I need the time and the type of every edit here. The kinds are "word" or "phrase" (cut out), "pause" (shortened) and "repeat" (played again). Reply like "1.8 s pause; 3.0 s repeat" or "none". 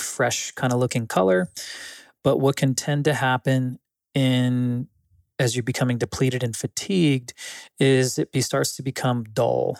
none